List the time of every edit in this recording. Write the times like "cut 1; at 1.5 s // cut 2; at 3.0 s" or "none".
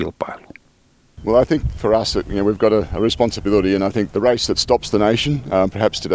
cut 1; at 4.1 s